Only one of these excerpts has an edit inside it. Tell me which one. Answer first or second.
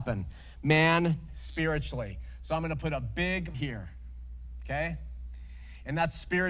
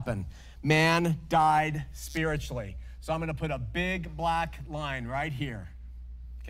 first